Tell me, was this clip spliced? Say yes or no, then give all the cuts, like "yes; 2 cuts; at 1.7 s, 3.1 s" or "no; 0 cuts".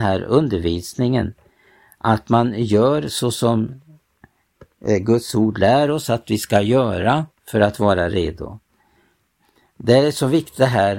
yes; 1 cut; at 7.3 s